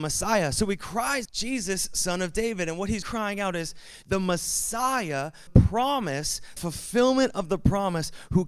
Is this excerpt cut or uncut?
cut